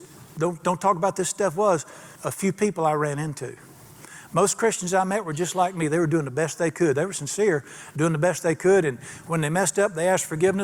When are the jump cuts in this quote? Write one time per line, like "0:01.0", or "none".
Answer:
0:02.2